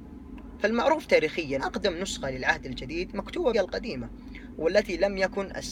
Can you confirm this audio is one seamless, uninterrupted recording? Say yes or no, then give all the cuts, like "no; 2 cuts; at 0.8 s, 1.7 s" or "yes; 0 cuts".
no; 2 cuts; at 1.6 s, 3.5 s